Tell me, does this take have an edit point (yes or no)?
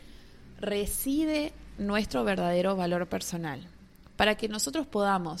no